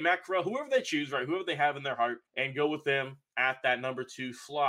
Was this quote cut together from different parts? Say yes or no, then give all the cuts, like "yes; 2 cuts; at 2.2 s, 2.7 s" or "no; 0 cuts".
yes; 1 cut; at 2.3 s